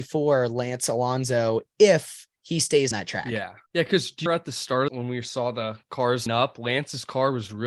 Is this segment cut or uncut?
cut